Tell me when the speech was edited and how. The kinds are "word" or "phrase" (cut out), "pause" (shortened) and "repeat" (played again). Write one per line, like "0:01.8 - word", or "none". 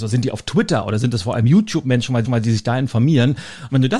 0:02.2 - repeat

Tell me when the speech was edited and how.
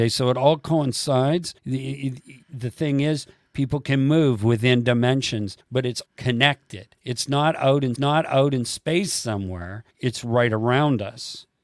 0:01.6 - pause
0:05.6 - pause
0:06.1 - word
0:07.0 - pause
0:08.0 - repeat
0:09.9 - pause

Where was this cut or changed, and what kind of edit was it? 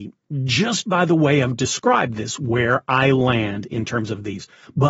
none

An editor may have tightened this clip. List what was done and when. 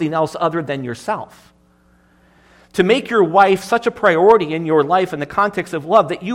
none

